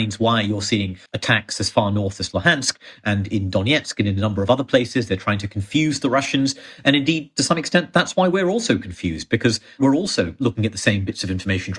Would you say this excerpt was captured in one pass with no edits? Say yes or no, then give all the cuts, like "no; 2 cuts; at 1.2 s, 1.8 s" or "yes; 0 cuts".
no; 1 cut; at 1.1 s